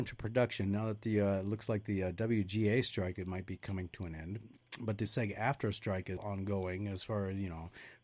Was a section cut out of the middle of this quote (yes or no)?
yes